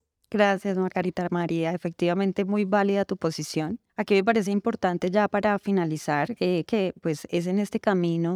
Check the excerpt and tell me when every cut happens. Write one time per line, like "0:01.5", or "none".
0:03.9
0:06.7